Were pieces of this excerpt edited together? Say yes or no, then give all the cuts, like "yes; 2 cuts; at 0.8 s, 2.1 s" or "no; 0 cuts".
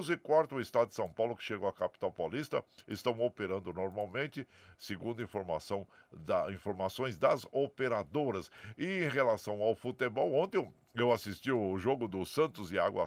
no; 0 cuts